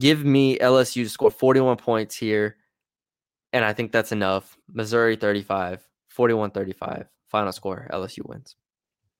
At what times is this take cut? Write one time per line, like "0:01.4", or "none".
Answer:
0:04.6